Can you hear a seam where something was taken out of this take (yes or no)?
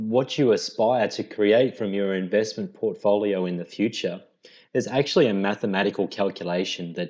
no